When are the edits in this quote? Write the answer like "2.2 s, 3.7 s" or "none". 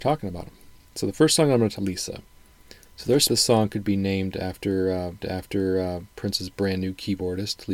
1.8 s, 3.3 s, 5.2 s